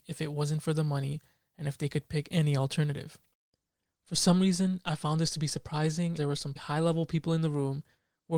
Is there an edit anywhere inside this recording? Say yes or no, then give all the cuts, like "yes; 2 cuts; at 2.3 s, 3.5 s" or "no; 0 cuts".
yes; 2 cuts; at 6.2 s, 6.6 s